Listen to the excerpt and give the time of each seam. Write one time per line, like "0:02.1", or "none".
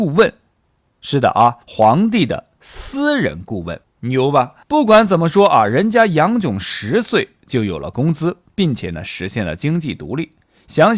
0:01.6
0:03.8
0:04.6